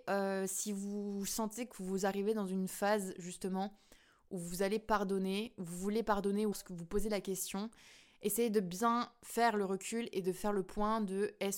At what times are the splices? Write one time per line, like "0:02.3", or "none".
0:06.5

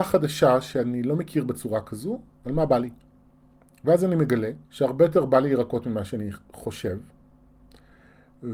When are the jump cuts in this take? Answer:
0:04.6

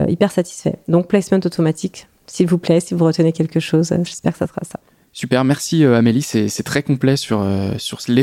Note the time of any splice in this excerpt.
none

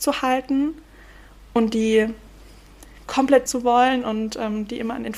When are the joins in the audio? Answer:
0:03.5

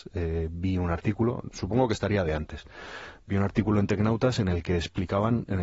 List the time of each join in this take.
none

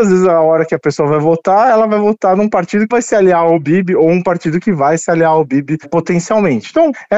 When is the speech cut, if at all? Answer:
0:02.9

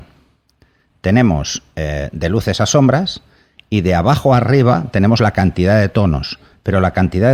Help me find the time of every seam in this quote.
none

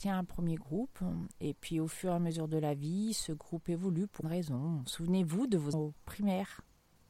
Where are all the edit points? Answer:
0:04.2
0:05.7

